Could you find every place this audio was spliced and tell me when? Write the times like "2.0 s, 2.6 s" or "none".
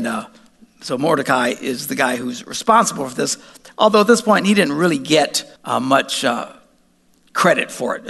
5.6 s